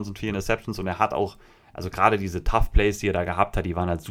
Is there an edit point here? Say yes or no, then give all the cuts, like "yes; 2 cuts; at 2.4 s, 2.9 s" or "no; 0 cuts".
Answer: no; 0 cuts